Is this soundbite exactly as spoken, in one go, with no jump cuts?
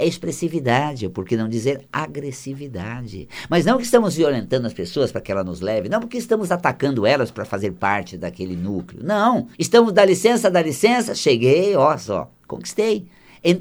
no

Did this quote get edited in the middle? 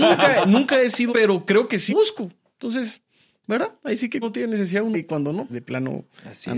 yes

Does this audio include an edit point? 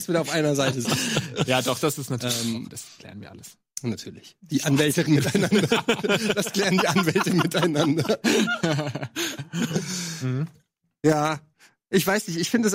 yes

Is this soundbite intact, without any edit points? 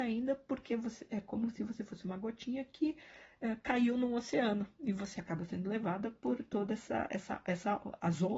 yes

